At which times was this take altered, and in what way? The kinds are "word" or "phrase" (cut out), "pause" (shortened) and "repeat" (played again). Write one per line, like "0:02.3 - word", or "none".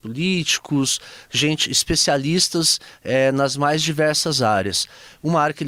none